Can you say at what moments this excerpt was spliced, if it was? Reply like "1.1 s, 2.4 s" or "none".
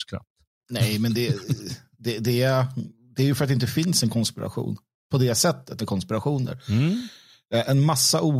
5.8 s